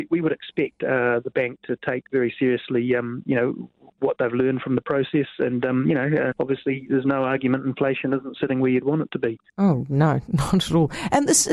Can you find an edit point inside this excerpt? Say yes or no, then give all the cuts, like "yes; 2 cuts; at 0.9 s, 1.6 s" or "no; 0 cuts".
yes; 2 cuts; at 6.3 s, 9.5 s